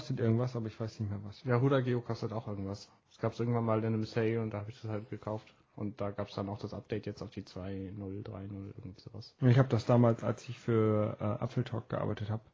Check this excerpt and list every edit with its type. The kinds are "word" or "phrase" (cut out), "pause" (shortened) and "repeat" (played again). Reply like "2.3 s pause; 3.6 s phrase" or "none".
3.0 s pause; 5.6 s pause